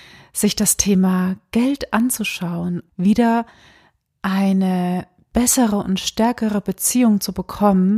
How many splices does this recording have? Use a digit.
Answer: 1